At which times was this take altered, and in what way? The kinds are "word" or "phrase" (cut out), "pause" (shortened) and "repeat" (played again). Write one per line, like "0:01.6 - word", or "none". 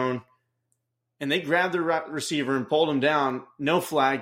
none